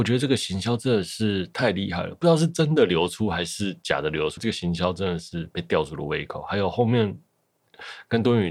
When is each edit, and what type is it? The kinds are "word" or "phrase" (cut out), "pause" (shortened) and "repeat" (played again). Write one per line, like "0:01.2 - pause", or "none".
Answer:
0:04.4 - word